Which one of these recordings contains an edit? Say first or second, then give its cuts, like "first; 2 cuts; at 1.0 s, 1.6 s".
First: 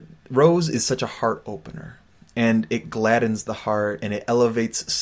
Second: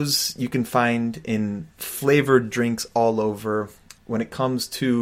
second; 2 cuts; at 1.7 s, 4.0 s